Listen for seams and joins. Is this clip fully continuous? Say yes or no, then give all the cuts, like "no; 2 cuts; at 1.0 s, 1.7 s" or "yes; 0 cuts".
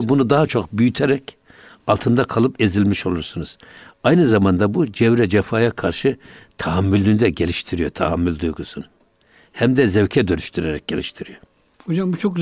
yes; 0 cuts